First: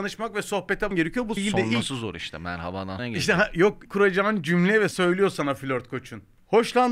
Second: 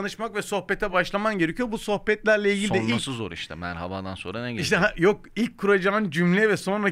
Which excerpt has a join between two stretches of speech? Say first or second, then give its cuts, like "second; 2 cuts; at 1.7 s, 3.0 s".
first; 5 cuts; at 0.9 s, 1.4 s, 3.0 s, 3.8 s, 4.9 s